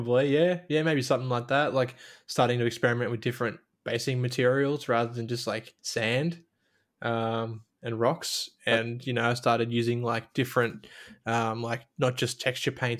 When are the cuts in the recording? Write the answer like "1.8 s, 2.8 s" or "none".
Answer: 5.8 s